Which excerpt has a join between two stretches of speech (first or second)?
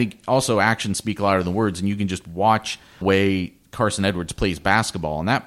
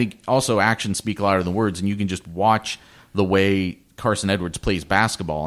first